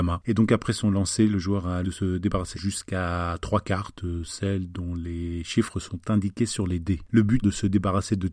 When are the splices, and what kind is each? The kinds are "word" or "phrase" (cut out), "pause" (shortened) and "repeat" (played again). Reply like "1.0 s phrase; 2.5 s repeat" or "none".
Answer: 1.8 s word; 2.5 s word; 7.4 s word